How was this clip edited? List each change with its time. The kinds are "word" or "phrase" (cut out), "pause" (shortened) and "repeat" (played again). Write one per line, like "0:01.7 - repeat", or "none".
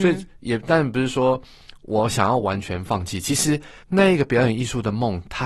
0:03.8 - pause